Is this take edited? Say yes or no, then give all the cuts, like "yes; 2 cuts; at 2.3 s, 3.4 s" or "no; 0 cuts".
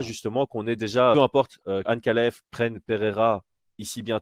yes; 2 cuts; at 1.1 s, 1.8 s